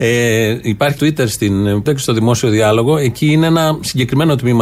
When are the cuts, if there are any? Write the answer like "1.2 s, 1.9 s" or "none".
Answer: 1.0 s, 1.9 s

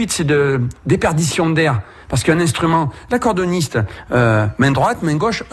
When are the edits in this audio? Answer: none

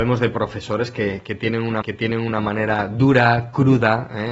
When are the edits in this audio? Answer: 1.8 s

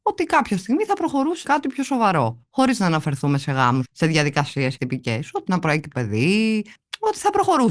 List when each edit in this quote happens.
1.4 s, 3.8 s, 4.8 s, 5.5 s, 5.9 s

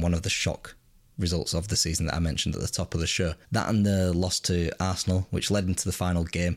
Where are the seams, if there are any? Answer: 3.4 s

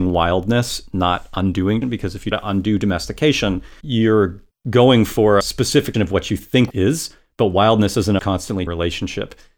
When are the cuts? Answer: 1.8 s, 2.3 s, 3.8 s, 5.4 s, 5.9 s, 6.7 s, 8.2 s, 8.7 s

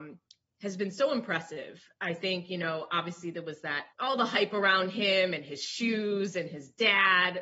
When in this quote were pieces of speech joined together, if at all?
3.9 s

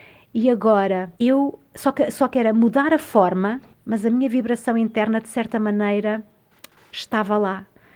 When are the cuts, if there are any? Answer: 1.2 s, 3.7 s

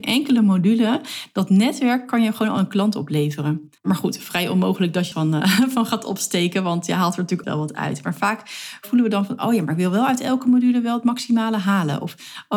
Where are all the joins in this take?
3.8 s, 5.1 s, 7.4 s

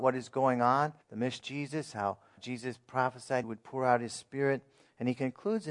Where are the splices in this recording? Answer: 1.0 s, 1.4 s, 2.4 s, 3.4 s

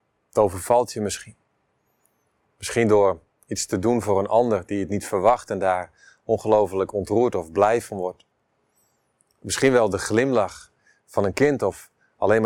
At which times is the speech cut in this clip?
none

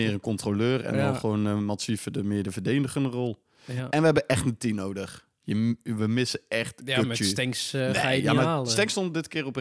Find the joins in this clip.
none

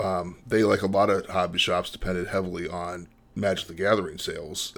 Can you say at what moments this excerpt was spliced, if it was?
none

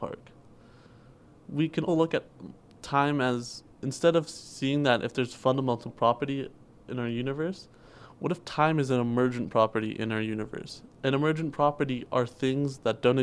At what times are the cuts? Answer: 1.9 s, 3.7 s

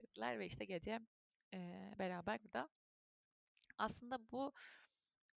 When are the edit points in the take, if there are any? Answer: 2.4 s

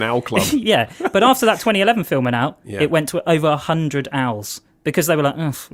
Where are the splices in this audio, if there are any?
none

